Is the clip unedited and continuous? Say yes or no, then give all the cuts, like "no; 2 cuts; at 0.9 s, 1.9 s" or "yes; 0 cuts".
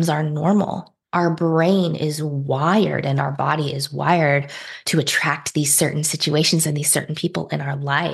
no; 1 cut; at 1.0 s